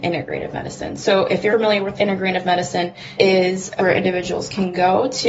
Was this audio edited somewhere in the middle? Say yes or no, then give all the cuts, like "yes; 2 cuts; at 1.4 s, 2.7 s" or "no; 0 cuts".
yes; 4 cuts; at 1.5 s, 2.0 s, 3.2 s, 3.8 s